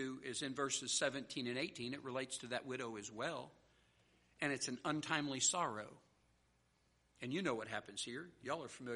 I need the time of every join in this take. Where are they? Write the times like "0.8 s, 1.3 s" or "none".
none

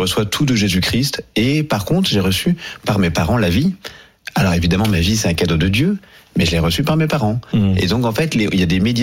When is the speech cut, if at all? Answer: none

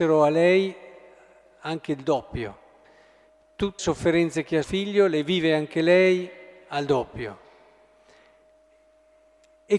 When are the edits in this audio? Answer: 3.8 s, 4.6 s

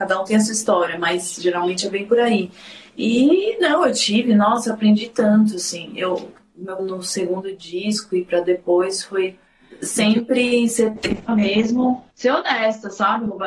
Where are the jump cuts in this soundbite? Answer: 2.9 s, 6.8 s, 11.3 s, 12.1 s

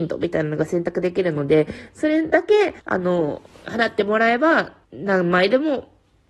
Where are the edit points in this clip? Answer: 2.8 s, 4.8 s

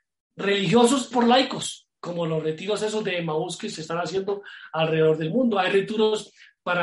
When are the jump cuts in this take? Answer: 1.1 s, 2.0 s

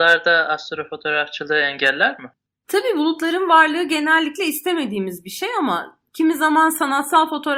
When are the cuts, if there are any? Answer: 2.5 s

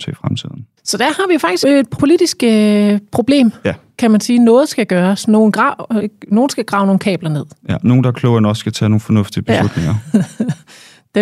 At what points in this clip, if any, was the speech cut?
1.6 s, 2.0 s, 6.0 s

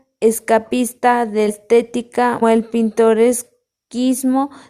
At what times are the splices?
1.5 s, 2.4 s

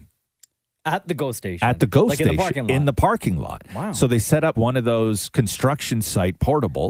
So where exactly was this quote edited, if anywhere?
4.5 s

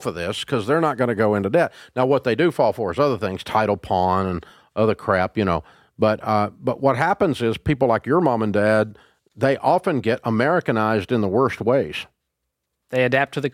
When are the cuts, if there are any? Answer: none

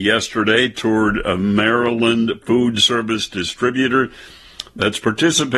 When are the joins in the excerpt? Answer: none

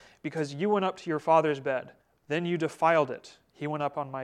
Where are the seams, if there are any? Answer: 2.0 s

